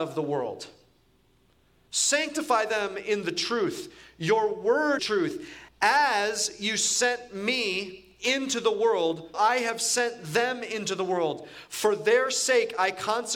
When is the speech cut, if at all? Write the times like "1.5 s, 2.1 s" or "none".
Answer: 5.0 s, 5.7 s, 9.3 s